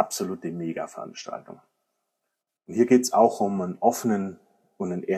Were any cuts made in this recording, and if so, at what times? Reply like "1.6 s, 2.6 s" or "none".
none